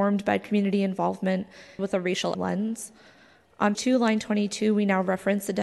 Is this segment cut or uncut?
cut